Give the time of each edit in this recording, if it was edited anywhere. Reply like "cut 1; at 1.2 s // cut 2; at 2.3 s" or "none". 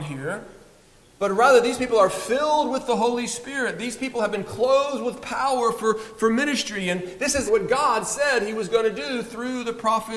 cut 1; at 7.5 s